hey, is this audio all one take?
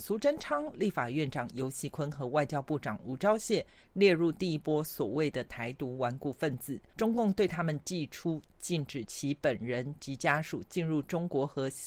no; 1 cut; at 6.9 s

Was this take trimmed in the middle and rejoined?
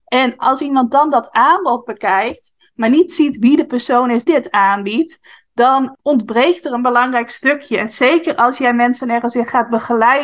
yes; 2 cuts; at 4.3 s, 5.9 s

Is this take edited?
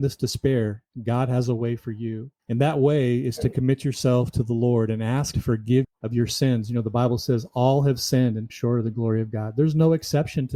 yes; 4 cuts; at 2.4 s, 5.3 s, 5.8 s, 8.5 s

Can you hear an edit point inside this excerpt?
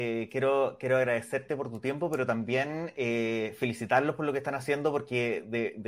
no; 0 cuts

